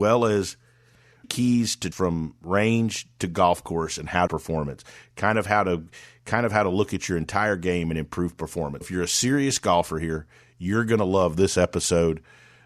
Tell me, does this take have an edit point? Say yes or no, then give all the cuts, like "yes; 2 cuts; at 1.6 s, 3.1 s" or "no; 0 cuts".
yes; 4 cuts; at 1.2 s, 1.9 s, 4.3 s, 8.8 s